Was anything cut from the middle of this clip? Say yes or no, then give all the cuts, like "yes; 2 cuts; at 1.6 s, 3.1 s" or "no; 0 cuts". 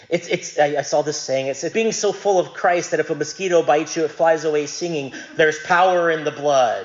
yes; 1 cut; at 1.7 s